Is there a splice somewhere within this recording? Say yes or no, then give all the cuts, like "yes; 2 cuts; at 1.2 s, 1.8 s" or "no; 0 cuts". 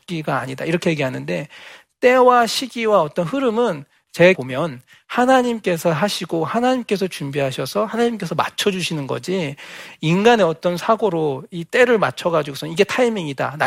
yes; 1 cut; at 4.3 s